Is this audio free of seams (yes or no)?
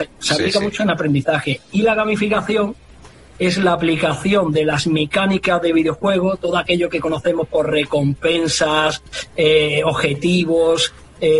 yes